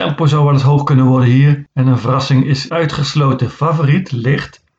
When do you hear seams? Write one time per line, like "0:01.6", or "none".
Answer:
0:02.7